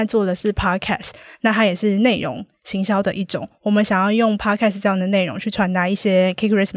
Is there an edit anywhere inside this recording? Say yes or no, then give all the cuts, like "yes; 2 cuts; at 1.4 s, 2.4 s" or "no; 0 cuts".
no; 0 cuts